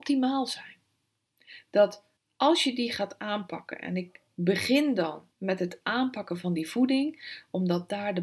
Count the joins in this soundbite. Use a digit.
2